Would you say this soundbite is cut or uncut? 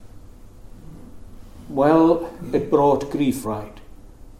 cut